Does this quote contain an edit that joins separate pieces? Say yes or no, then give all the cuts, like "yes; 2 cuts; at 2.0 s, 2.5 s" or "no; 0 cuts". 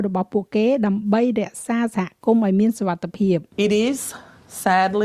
yes; 1 cut; at 3.5 s